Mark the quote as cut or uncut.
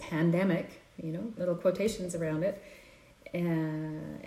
cut